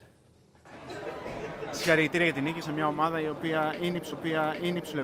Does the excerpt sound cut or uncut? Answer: cut